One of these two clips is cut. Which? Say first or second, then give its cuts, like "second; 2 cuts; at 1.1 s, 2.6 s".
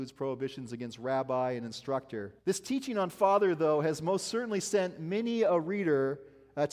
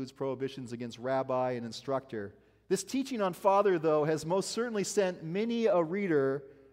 first; 1 cut; at 2.4 s